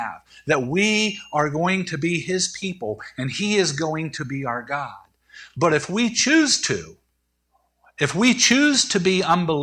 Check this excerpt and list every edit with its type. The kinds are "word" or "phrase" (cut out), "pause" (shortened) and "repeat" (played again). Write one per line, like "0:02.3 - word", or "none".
none